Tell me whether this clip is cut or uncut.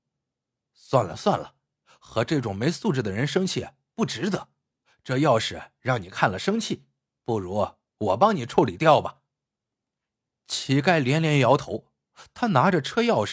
uncut